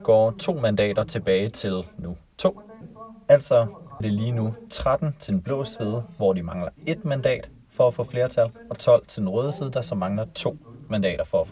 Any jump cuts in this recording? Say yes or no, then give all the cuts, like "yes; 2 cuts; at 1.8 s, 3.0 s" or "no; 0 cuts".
yes; 1 cut; at 4.0 s